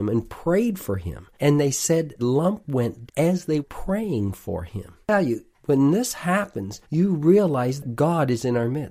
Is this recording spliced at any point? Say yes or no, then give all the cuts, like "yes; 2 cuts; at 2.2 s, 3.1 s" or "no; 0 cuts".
yes; 6 cuts; at 1.3 s, 2.2 s, 3.1 s, 3.6 s, 5.0 s, 6.8 s